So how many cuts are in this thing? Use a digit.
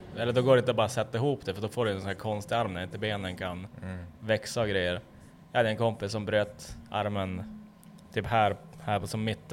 0